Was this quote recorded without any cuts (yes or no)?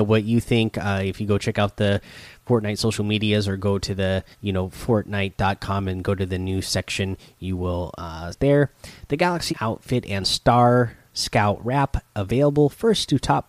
no